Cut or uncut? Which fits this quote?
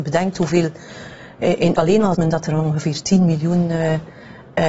cut